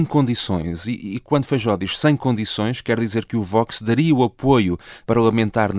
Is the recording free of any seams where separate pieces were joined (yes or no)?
yes